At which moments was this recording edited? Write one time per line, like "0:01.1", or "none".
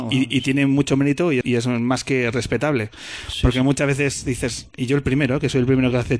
0:01.4
0:04.7